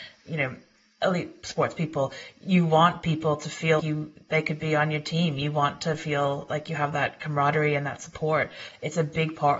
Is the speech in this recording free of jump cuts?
no; 1 cut; at 3.8 s

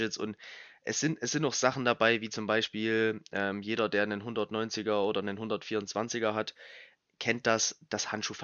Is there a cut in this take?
no; 0 cuts

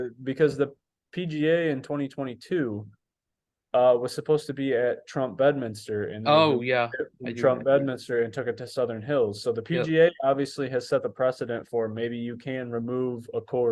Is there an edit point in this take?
no; 0 cuts

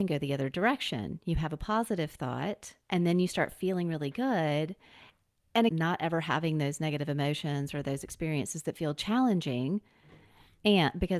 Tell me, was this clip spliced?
yes; 2 cuts; at 2.8 s, 5.7 s

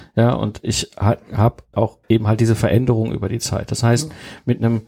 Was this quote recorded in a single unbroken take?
no; 2 cuts; at 1.7 s, 2.0 s

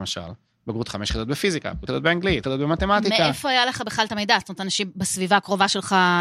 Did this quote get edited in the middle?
yes; 2 cuts; at 1.9 s, 2.4 s

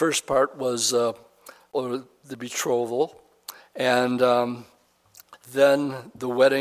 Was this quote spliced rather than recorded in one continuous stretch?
yes; 2 cuts; at 3.6 s, 5.4 s

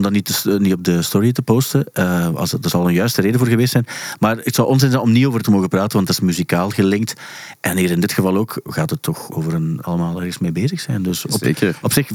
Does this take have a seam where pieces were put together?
yes; 4 cuts; at 5.4 s, 8.6 s, 9.3 s, 9.8 s

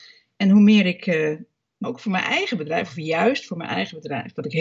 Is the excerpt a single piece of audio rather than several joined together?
no; 1 cut; at 1.8 s

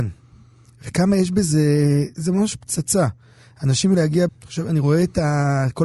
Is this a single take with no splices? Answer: no; 3 cuts; at 2.1 s, 3.9 s, 4.3 s

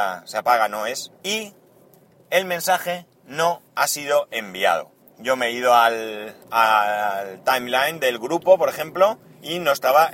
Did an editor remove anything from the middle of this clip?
yes; 3 cuts; at 1.2 s, 5.0 s, 6.4 s

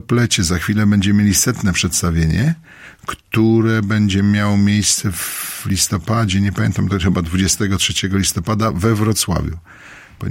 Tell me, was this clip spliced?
no; 0 cuts

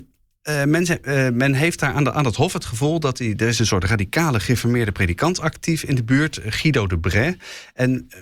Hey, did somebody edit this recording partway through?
no; 0 cuts

